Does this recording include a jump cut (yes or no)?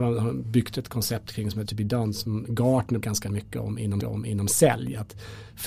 yes